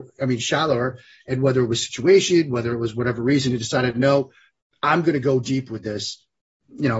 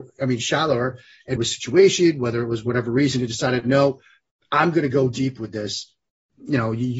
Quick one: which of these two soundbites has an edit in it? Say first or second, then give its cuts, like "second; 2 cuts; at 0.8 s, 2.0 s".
second; 1 cut; at 1.4 s